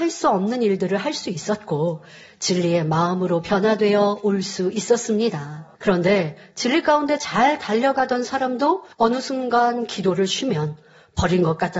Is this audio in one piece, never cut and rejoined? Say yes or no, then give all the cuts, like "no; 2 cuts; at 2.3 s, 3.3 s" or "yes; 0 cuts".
no; 2 cuts; at 5.7 s, 8.9 s